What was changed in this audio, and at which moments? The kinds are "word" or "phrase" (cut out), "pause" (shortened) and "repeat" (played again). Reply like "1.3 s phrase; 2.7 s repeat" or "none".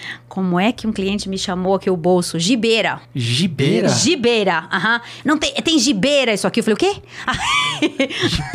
3.0 s pause